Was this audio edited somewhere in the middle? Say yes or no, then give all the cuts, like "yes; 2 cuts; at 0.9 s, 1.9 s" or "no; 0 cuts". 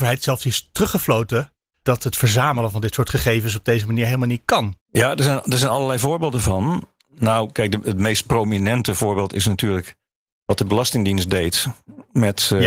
yes; 1 cut; at 4.8 s